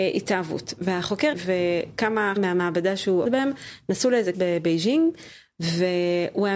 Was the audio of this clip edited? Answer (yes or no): yes